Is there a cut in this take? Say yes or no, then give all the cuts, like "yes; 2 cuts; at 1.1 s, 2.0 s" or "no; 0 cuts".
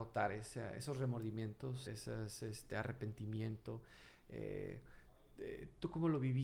yes; 1 cut; at 1.9 s